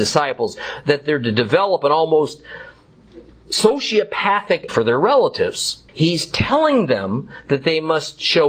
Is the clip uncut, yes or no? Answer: no